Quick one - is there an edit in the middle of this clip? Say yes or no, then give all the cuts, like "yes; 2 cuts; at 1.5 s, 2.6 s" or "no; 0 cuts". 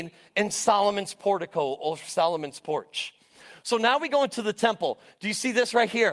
no; 0 cuts